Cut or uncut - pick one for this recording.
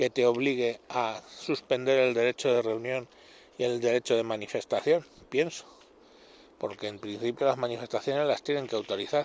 uncut